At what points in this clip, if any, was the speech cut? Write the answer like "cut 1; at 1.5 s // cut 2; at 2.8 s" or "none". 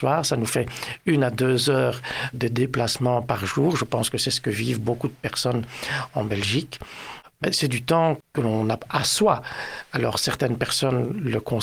cut 1; at 2.3 s